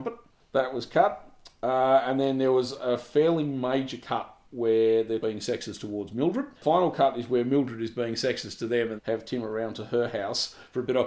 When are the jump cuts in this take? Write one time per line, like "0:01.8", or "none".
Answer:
0:04.4
0:05.2
0:06.6
0:09.0